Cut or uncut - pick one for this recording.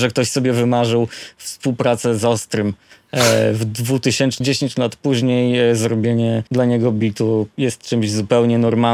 cut